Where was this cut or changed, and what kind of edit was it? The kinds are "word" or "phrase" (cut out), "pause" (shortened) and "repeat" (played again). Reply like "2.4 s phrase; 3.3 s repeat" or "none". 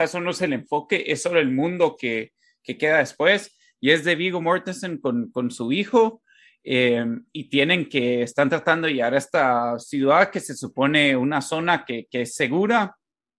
none